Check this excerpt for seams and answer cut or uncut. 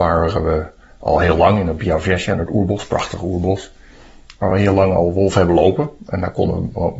uncut